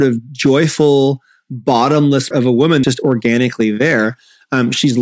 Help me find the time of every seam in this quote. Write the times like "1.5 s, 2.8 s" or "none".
2.3 s, 2.8 s